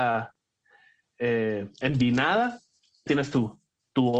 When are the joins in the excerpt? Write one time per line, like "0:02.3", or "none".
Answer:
0:03.1